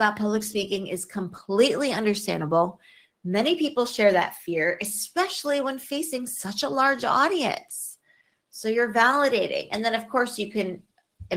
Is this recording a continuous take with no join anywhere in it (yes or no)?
yes